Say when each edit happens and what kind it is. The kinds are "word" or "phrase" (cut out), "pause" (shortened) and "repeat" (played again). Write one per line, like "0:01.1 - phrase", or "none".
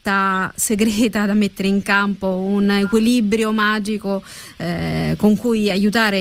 none